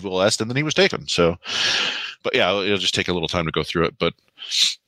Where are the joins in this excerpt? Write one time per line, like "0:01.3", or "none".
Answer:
0:02.2

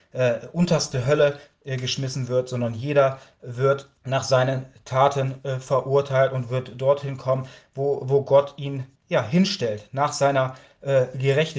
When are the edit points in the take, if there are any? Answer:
0:04.0
0:08.9

